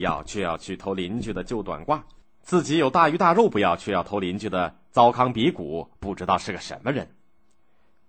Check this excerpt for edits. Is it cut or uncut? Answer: uncut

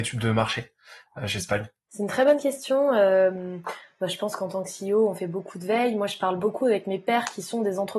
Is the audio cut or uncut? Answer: cut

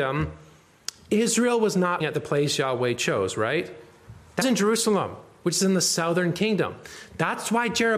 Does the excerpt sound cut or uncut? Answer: cut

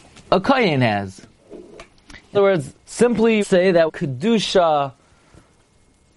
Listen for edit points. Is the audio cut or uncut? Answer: cut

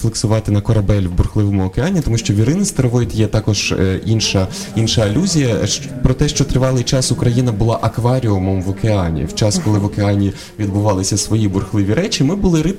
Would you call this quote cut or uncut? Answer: uncut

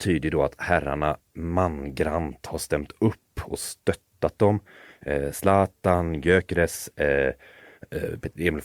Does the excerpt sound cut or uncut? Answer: uncut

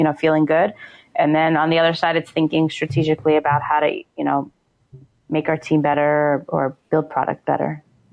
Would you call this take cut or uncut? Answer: uncut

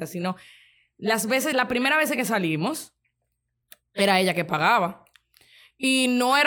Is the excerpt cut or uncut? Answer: uncut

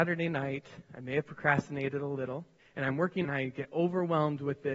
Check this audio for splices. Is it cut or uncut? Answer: cut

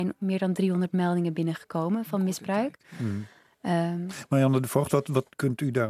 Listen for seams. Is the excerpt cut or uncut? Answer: uncut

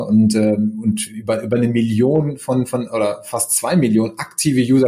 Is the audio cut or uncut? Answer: uncut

